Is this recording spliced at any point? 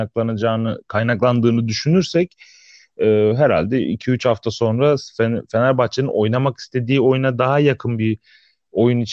no; 0 cuts

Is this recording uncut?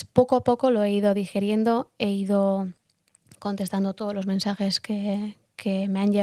yes; 0 cuts

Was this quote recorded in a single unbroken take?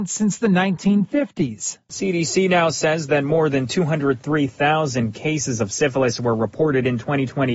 yes; 0 cuts

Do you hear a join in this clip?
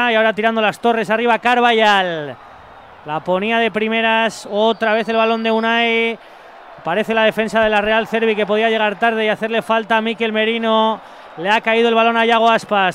no; 0 cuts

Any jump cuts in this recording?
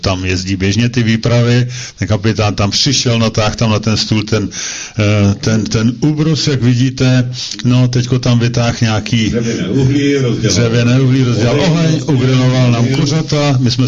no; 0 cuts

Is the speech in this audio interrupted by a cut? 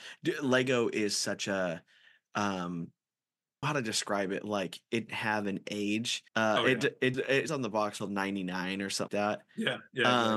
yes; 7 cuts; at 3.6 s, 5.1 s, 6.3 s, 7.1 s, 7.5 s, 8.0 s, 9.1 s

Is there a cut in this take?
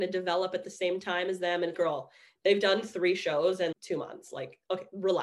yes; 2 cuts; at 1.7 s, 3.7 s

